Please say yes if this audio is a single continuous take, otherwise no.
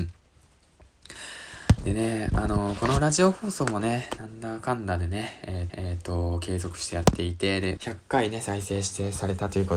no